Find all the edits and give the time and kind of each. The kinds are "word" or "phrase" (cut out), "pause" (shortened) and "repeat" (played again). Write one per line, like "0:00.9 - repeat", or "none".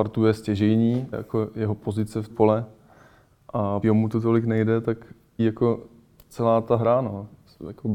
0:01.1 - word
0:02.3 - phrase
0:03.8 - phrase
0:05.4 - word